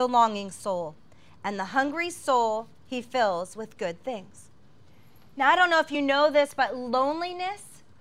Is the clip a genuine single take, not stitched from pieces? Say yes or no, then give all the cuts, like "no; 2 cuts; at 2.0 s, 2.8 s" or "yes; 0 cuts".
yes; 0 cuts